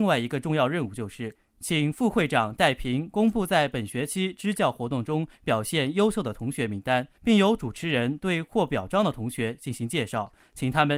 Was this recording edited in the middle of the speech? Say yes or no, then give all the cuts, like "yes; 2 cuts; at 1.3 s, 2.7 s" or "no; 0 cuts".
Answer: yes; 1 cut; at 7.2 s